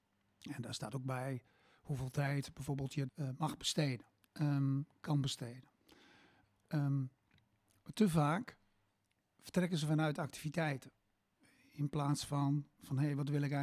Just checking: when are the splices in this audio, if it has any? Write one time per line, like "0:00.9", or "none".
0:03.1